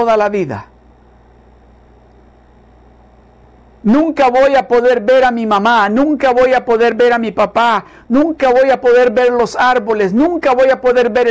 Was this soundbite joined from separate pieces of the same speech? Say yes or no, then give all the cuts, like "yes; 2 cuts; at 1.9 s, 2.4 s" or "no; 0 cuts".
no; 0 cuts